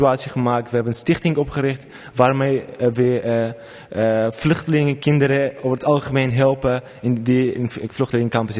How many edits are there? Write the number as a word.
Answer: zero